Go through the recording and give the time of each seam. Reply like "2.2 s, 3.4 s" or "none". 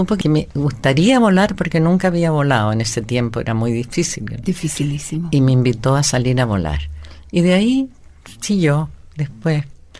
none